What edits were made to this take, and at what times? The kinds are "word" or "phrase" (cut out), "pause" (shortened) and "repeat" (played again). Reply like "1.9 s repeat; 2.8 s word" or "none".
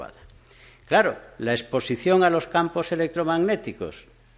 none